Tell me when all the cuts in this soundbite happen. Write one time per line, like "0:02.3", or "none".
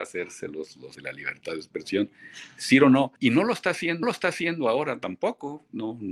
0:01.0
0:03.2
0:04.0